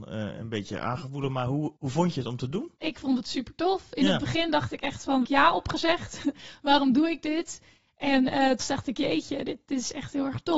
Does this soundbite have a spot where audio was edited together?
yes; 4 cuts; at 1.8 s, 2.8 s, 5.2 s, 8.6 s

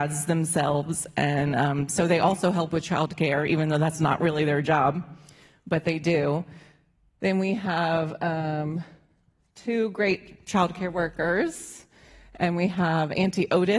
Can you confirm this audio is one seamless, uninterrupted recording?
yes; 0 cuts

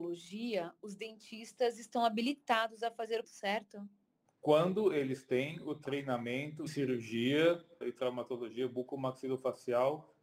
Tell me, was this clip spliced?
yes; 3 cuts; at 3.2 s, 6.7 s, 7.8 s

